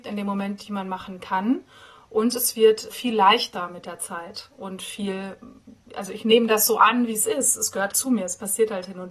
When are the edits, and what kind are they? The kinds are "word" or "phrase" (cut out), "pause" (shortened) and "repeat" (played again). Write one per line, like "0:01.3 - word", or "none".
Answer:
0:02.9 - word
0:07.9 - word